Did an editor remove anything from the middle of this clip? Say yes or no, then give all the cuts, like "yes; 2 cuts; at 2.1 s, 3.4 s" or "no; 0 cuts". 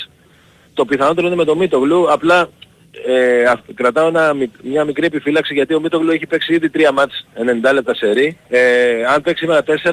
yes; 1 cut; at 8.4 s